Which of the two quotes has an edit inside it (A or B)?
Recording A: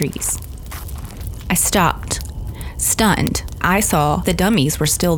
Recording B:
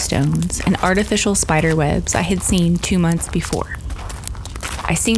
A